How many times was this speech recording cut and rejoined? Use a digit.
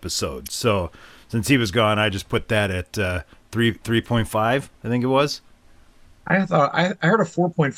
0